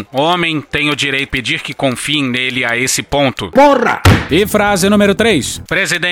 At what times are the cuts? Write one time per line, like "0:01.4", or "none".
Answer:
0:01.3